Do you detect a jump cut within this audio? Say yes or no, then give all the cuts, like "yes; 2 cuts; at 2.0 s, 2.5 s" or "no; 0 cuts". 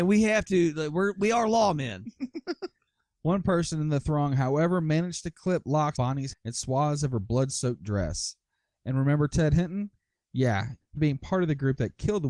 yes; 3 cuts; at 6.0 s, 6.3 s, 11.0 s